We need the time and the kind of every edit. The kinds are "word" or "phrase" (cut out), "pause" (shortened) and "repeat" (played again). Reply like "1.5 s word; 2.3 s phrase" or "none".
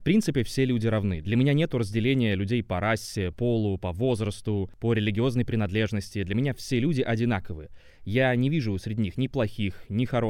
3.3 s word